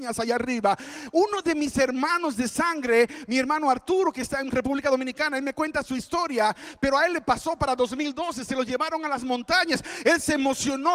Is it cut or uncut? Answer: uncut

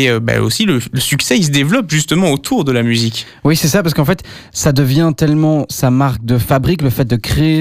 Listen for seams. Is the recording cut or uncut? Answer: uncut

